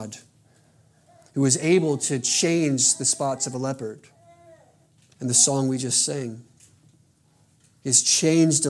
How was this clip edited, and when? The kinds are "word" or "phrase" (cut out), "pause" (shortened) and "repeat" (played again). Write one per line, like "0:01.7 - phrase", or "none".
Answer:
none